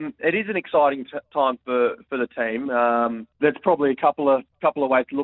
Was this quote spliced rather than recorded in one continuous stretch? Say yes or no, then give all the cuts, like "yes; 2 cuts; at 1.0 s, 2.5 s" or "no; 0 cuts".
yes; 1 cut; at 3.3 s